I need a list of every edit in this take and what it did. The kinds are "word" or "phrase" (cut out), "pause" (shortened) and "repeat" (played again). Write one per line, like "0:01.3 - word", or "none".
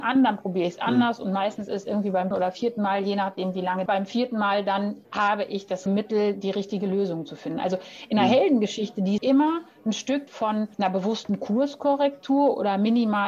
0:02.3 - word
0:03.9 - phrase
0:05.0 - pause
0:05.9 - word
0:09.2 - phrase
0:10.3 - word
0:10.7 - pause